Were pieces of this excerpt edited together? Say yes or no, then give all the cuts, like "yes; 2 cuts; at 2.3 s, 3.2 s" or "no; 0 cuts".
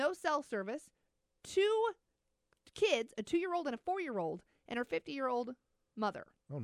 no; 0 cuts